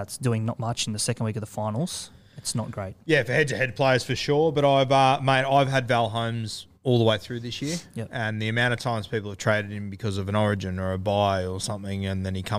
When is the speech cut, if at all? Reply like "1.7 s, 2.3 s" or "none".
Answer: 6.7 s